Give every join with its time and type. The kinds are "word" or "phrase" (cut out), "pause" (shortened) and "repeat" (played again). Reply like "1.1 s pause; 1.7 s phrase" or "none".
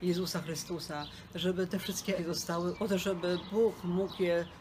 1.7 s word; 2.2 s word; 2.7 s word